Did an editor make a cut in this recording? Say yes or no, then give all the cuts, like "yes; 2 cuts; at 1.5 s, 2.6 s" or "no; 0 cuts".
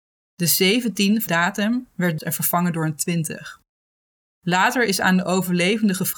yes; 2 cuts; at 1.3 s, 2.2 s